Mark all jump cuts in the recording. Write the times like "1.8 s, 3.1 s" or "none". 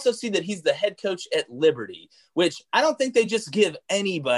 none